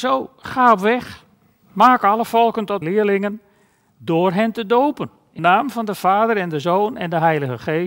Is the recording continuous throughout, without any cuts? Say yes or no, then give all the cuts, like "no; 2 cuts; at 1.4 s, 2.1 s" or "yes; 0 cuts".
no; 2 cuts; at 2.8 s, 5.4 s